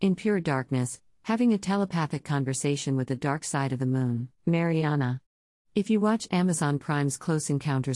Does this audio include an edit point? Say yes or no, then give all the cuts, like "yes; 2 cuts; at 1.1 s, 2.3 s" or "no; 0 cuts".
yes; 1 cut; at 4.4 s